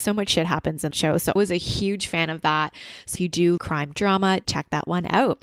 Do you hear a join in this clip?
yes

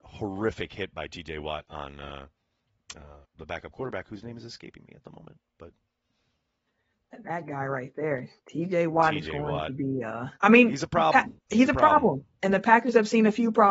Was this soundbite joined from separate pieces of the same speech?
yes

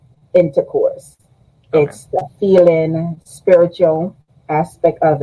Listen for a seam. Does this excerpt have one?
no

